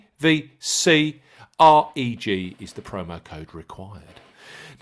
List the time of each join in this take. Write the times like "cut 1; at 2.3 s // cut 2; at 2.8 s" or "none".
none